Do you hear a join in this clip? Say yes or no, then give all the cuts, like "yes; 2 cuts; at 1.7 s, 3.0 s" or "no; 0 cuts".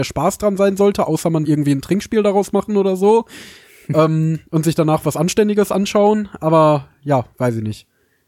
yes; 1 cut; at 1.5 s